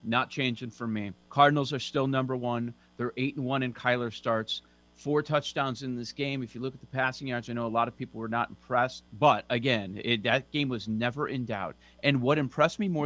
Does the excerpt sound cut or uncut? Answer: cut